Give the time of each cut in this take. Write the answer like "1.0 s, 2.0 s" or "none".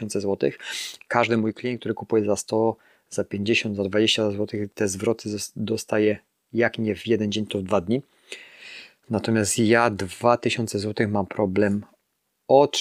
none